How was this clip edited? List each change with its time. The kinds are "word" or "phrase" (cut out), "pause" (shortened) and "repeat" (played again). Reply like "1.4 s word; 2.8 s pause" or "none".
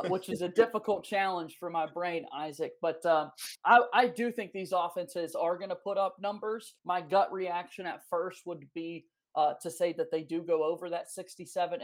6.8 s pause